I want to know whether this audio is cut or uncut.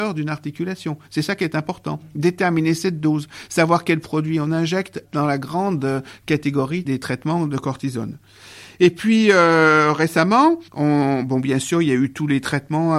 cut